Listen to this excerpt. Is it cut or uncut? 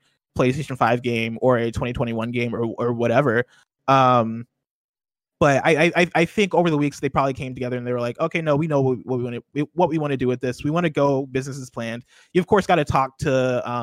uncut